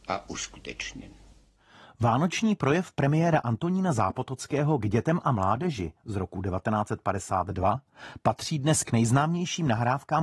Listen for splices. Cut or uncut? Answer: uncut